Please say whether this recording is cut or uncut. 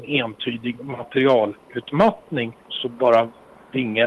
cut